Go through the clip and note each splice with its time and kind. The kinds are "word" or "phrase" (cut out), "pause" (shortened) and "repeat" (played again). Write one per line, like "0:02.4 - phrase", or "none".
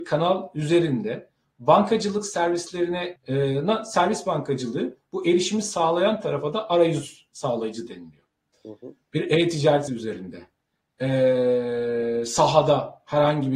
0:03.2 - phrase
0:08.5 - pause
0:09.9 - word